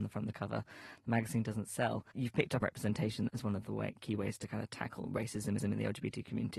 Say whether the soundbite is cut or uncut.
cut